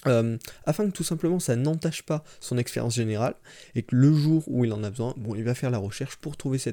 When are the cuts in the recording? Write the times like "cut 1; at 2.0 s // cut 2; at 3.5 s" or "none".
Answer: none